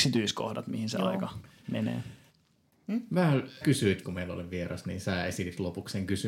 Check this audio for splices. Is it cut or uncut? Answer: cut